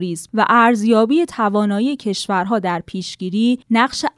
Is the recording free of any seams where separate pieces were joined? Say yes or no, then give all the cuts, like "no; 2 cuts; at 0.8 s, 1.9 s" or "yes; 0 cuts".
yes; 0 cuts